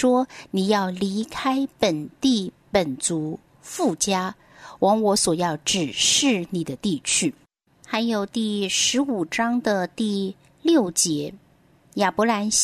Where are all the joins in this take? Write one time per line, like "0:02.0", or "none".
0:07.4